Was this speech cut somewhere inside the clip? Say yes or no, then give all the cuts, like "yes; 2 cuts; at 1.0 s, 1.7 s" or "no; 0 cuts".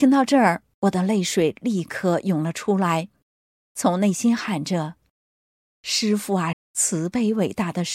yes; 1 cut; at 6.5 s